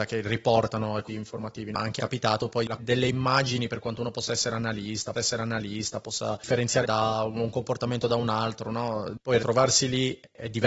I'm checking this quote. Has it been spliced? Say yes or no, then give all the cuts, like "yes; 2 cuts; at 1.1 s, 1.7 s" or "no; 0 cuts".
yes; 6 cuts; at 1.1 s, 2.0 s, 2.8 s, 5.1 s, 6.8 s, 9.4 s